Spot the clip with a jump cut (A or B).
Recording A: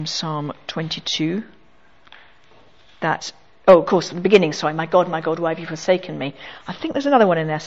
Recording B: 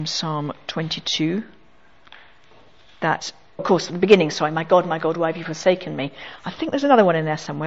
B